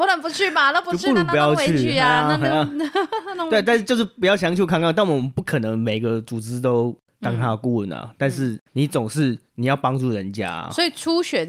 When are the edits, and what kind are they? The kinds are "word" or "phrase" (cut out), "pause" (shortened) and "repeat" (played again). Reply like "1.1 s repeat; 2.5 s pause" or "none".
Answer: 8.7 s pause